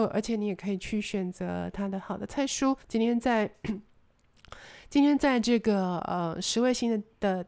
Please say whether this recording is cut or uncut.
cut